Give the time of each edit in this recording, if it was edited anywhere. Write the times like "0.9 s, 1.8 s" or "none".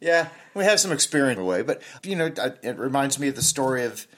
1.4 s, 2.0 s